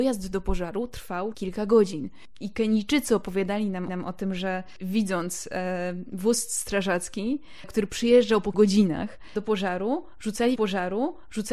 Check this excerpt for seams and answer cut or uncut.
cut